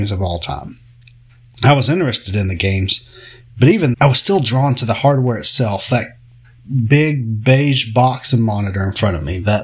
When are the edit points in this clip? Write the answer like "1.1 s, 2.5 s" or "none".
3.9 s